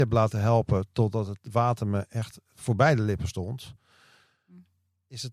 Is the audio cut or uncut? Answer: uncut